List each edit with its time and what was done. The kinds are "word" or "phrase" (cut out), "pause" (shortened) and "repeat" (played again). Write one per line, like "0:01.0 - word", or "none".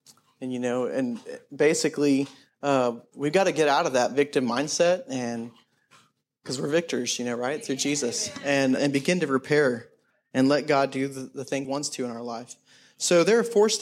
0:08.8 - word
0:11.6 - phrase